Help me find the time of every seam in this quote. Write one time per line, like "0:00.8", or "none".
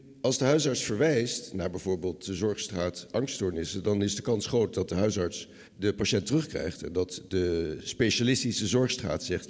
0:05.7